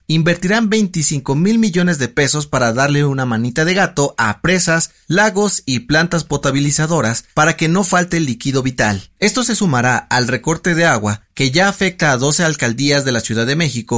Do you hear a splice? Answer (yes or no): no